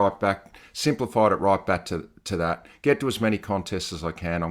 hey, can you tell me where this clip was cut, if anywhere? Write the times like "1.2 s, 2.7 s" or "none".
none